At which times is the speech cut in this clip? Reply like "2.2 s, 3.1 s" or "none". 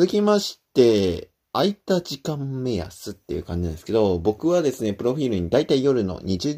3.2 s